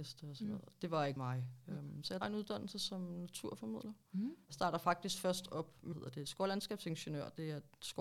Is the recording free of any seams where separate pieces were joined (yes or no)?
no